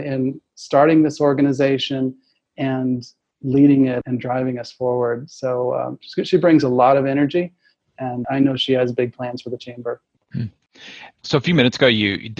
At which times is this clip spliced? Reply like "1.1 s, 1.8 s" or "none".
none